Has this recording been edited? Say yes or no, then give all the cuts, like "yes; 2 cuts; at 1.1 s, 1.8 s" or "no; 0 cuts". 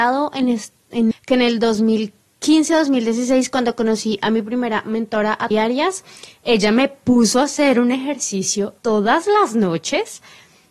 yes; 3 cuts; at 1.1 s, 5.5 s, 8.8 s